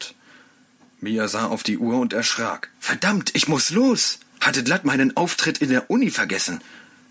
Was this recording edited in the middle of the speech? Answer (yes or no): yes